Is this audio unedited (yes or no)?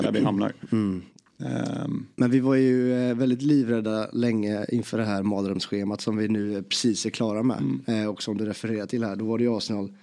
yes